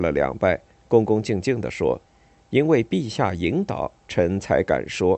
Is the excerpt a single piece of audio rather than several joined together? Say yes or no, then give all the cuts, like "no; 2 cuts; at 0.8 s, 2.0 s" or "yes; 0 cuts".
no; 1 cut; at 2.1 s